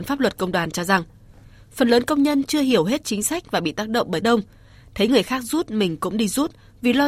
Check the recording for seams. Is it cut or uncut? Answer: cut